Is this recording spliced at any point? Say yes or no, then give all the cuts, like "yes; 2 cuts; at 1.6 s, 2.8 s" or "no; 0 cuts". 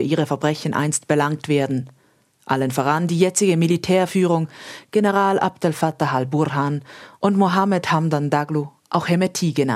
no; 0 cuts